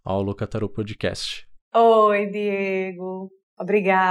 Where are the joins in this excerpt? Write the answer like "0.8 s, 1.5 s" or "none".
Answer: 1.6 s